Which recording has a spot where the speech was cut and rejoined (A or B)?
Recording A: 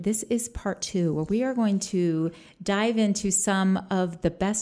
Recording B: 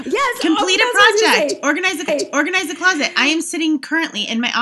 B